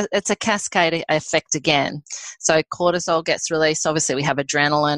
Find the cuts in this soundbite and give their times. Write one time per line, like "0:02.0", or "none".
none